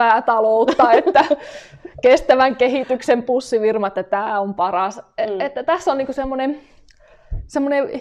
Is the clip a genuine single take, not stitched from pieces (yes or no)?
yes